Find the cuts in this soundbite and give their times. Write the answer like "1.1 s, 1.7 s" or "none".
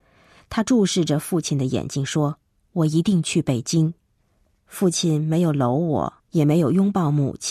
2.5 s, 4.0 s, 6.2 s